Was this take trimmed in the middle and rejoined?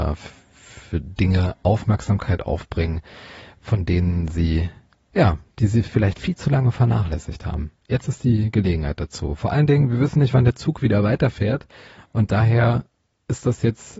no; 0 cuts

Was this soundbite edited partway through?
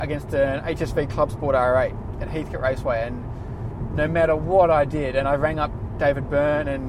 no; 0 cuts

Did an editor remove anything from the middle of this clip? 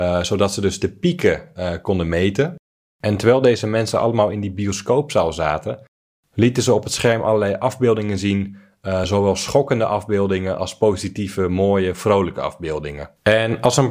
no; 0 cuts

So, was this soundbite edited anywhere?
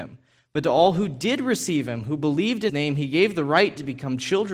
yes; 1 cut; at 2.7 s

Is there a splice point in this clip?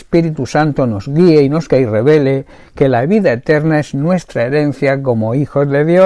yes; 1 cut; at 1.7 s

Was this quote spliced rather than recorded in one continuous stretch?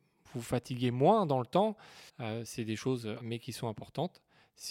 yes; 2 cuts; at 2.1 s, 3.2 s

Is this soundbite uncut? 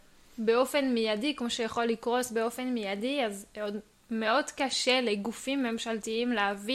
yes; 0 cuts

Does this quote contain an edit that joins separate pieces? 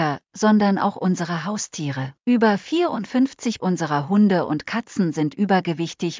yes; 2 cuts; at 2.2 s, 3.6 s

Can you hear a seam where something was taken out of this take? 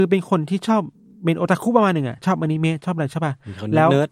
no; 0 cuts

